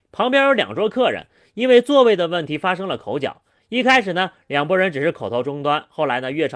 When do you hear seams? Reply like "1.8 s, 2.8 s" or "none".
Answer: none

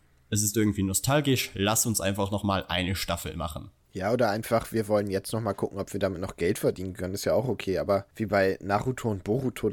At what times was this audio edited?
8.1 s

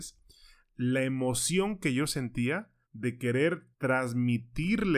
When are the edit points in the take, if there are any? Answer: 2.8 s, 3.7 s

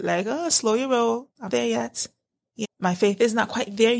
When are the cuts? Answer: 1.5 s, 2.6 s

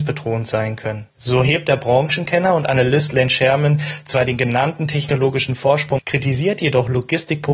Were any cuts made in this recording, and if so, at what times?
1.1 s, 6.0 s

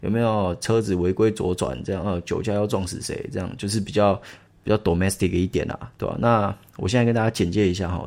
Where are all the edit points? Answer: 4.5 s

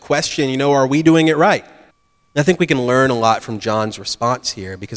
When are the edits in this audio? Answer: 1.9 s

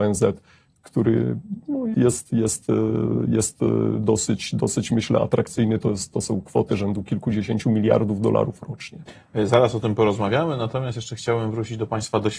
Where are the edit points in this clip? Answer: 1.9 s

